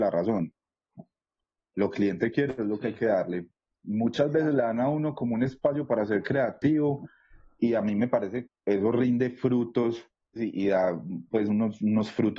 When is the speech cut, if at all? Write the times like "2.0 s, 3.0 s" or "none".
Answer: 1.9 s, 8.5 s, 10.4 s